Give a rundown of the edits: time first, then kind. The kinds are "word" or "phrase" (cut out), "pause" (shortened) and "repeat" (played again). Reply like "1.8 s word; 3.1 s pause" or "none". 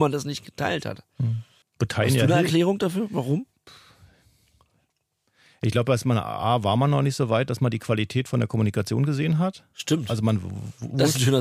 1.6 s pause